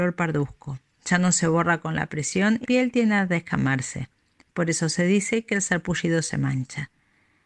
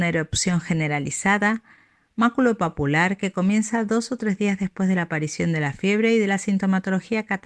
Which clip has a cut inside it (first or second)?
first